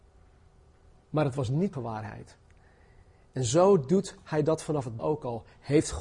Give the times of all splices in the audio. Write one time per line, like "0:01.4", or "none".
0:01.7
0:05.0

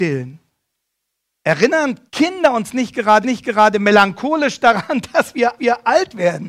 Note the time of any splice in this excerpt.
0:02.1
0:03.2
0:05.6

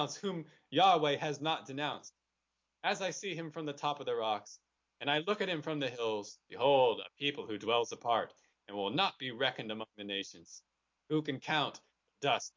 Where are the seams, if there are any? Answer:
none

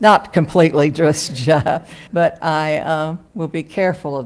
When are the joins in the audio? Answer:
0:02.1
0:03.3

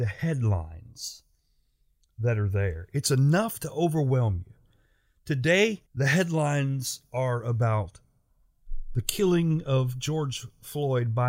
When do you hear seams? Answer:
0:05.9

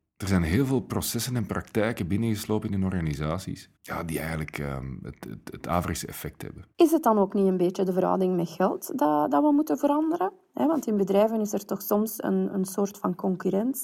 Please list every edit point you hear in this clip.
0:03.8
0:06.7

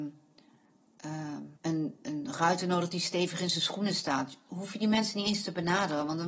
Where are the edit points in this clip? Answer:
0:01.6

